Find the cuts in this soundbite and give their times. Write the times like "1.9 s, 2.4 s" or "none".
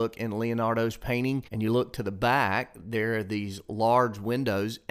1.5 s